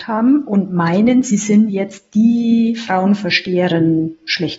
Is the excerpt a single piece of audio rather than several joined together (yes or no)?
yes